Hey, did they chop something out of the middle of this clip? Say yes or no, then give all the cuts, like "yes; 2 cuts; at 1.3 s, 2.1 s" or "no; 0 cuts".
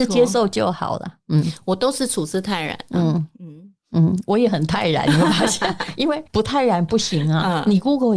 yes; 1 cut; at 6.3 s